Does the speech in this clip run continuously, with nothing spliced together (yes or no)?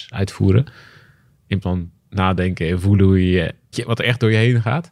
no